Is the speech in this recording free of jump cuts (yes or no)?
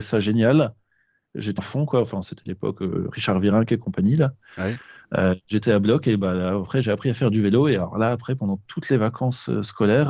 no